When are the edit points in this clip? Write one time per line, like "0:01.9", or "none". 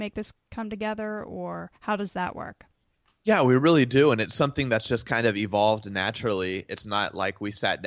0:01.7